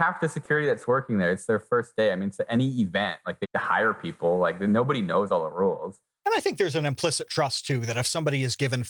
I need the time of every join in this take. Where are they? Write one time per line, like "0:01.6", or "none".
0:03.4